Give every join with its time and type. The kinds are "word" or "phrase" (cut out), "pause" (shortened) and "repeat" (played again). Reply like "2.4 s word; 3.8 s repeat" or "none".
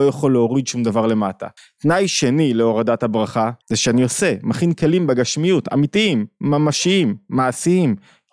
1.6 s pause; 3.6 s pause